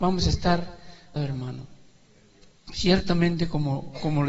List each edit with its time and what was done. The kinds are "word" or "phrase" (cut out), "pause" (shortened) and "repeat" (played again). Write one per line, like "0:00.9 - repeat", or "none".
0:01.2 - word